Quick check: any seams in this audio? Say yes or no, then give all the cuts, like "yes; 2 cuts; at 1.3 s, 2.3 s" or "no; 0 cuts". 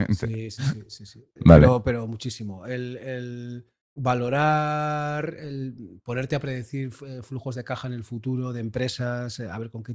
yes; 2 cuts; at 1.4 s, 3.8 s